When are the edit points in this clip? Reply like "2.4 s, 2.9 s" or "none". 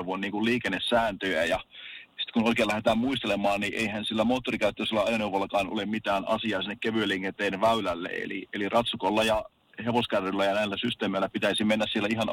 none